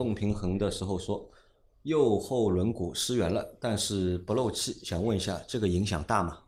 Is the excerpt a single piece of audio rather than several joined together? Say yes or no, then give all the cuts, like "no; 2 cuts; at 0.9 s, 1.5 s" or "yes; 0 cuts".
yes; 0 cuts